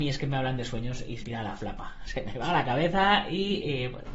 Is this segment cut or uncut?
cut